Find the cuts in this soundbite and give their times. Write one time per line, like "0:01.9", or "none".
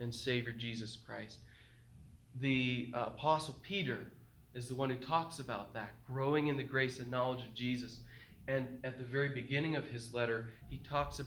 none